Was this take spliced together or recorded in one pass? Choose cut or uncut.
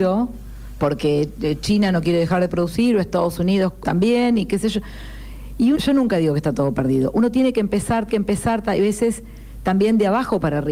cut